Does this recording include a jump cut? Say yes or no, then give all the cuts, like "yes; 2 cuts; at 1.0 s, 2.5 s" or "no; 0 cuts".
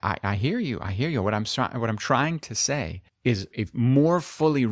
yes; 1 cut; at 3.5 s